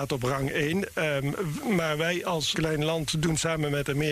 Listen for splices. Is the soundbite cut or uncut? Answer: cut